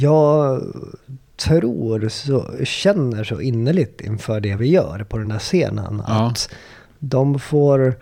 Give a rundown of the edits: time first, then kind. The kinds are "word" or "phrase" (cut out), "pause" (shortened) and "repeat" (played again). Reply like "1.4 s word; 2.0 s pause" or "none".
none